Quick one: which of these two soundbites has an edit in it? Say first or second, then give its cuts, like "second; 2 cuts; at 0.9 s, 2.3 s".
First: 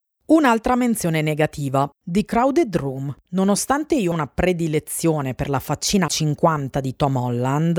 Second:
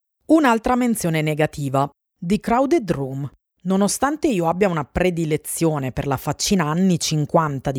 first; 4 cuts; at 1.9 s, 3.2 s, 4.1 s, 6.1 s